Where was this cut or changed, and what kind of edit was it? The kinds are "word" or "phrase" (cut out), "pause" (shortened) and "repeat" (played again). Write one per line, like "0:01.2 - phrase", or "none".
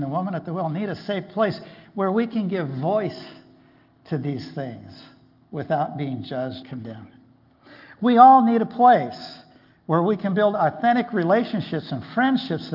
0:06.6 - word